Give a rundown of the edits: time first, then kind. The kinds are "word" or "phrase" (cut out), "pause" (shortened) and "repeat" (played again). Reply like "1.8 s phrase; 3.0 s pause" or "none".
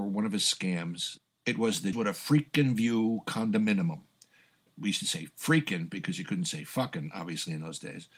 1.9 s word